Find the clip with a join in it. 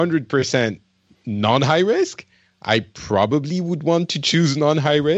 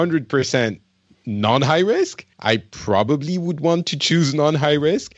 second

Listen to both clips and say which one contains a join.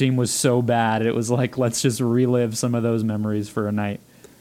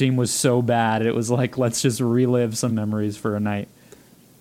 second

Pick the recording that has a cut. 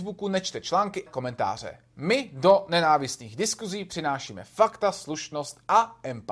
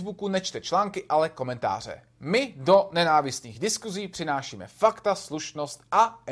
first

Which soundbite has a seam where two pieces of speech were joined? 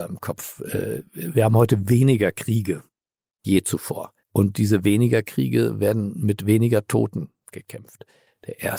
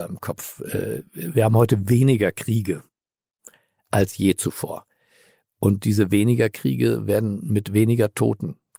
first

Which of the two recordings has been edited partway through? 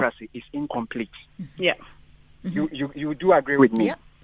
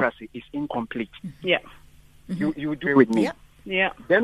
second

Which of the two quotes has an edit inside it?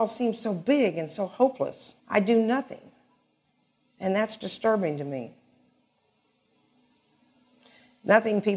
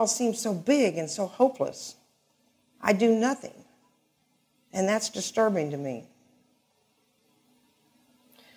first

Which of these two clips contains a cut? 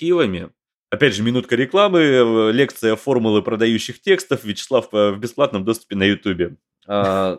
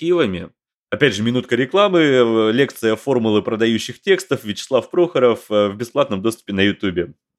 first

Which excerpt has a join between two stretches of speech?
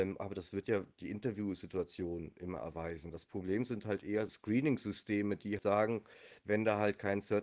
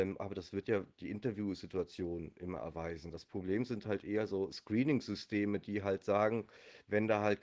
first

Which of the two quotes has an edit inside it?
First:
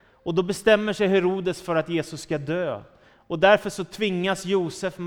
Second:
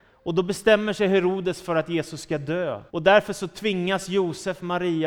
second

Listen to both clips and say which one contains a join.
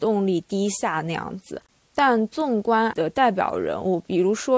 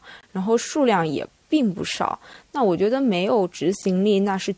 first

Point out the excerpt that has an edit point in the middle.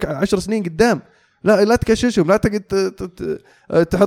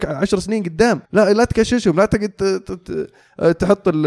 second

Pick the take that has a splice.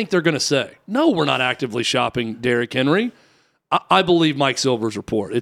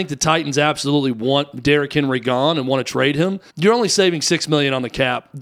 second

